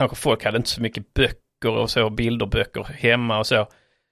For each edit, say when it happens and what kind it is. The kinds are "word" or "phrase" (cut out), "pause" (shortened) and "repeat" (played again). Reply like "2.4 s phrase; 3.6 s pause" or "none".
none